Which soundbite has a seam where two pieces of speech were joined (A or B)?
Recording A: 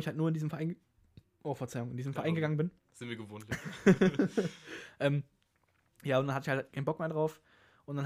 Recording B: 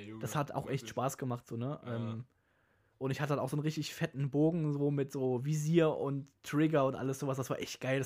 A